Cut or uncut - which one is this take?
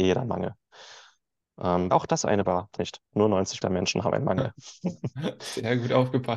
cut